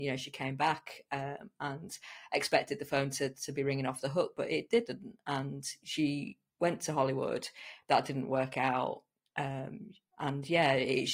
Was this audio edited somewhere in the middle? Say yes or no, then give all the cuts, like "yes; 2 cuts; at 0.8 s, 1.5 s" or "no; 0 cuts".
no; 0 cuts